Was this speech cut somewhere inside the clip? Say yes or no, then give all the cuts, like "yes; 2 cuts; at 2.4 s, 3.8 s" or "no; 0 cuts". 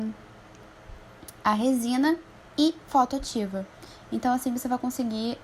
no; 0 cuts